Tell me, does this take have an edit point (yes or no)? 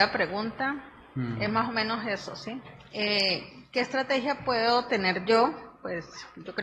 no